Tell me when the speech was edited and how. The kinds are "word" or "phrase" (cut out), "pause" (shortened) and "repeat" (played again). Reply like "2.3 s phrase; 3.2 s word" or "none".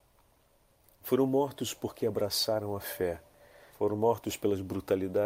3.7 s pause